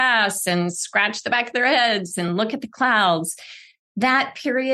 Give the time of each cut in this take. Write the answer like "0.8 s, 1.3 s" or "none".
none